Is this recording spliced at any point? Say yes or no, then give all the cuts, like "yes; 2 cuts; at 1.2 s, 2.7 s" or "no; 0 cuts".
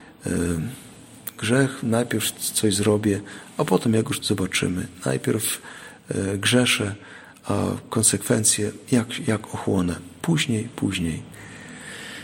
yes; 1 cut; at 4.2 s